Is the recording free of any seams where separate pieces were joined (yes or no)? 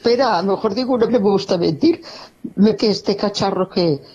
no